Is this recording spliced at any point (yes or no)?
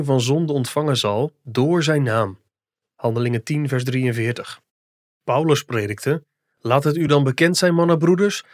no